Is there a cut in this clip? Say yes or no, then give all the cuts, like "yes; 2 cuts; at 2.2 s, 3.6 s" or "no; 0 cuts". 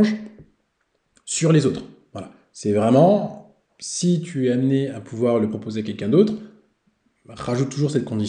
no; 0 cuts